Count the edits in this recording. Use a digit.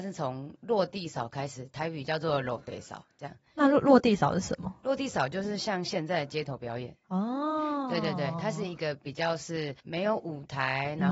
1